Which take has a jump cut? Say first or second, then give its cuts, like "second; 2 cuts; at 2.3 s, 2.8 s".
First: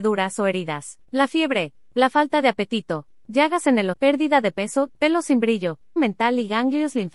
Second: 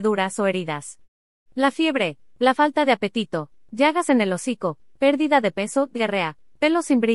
first; 4 cuts; at 1.1 s, 3.9 s, 4.9 s, 6.0 s